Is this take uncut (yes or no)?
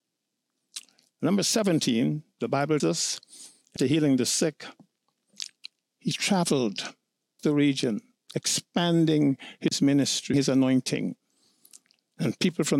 no